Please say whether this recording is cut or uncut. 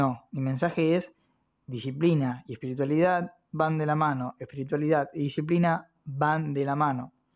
uncut